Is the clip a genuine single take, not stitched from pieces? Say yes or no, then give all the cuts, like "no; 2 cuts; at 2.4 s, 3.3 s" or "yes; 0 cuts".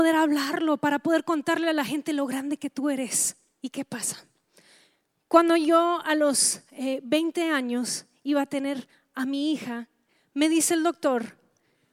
yes; 0 cuts